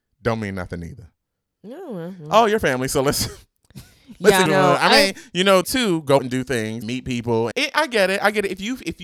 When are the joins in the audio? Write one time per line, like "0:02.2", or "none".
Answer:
0:04.5
0:05.6
0:06.2
0:06.8
0:07.5